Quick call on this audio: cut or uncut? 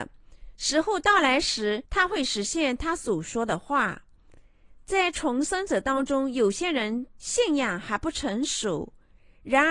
cut